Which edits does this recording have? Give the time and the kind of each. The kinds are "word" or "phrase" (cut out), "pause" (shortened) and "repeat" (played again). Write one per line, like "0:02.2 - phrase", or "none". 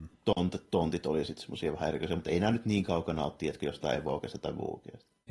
none